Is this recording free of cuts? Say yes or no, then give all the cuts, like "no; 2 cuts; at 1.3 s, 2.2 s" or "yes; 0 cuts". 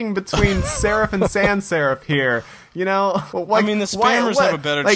no; 1 cut; at 3.3 s